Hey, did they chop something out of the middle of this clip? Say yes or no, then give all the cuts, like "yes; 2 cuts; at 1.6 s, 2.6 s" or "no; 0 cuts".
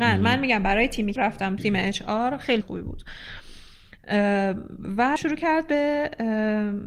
yes; 4 cuts; at 1.2 s, 1.6 s, 2.6 s, 5.2 s